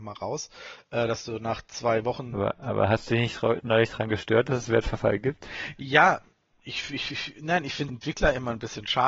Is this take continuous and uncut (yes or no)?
no